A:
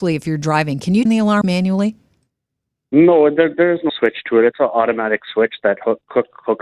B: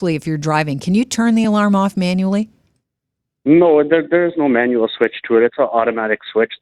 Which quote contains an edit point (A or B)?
A